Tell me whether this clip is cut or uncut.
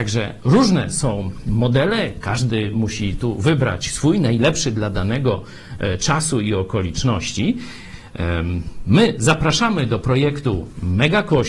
uncut